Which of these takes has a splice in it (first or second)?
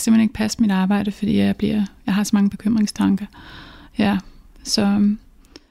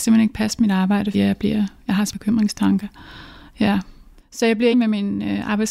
second